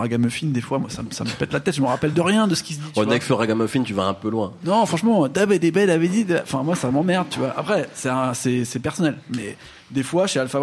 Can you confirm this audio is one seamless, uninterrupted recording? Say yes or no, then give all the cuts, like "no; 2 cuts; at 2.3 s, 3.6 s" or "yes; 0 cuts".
yes; 0 cuts